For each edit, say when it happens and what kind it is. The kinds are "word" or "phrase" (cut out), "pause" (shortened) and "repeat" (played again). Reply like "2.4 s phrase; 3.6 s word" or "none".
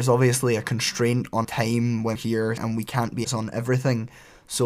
1.4 s word; 2.1 s word; 2.6 s word; 3.2 s word